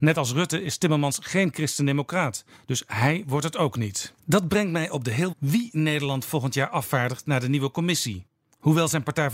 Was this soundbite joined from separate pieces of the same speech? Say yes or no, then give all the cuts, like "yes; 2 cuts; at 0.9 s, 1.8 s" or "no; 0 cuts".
yes; 2 cuts; at 4.2 s, 5.3 s